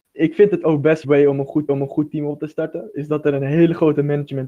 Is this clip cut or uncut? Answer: cut